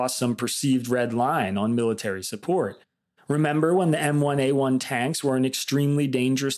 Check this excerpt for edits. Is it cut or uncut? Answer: uncut